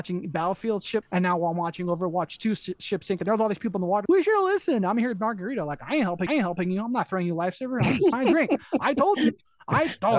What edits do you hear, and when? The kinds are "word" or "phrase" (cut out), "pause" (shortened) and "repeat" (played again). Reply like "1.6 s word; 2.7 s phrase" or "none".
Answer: 1.0 s word; 4.1 s word; 6.3 s repeat; 8.1 s word